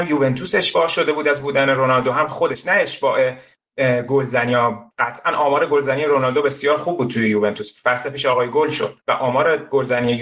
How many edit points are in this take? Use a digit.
2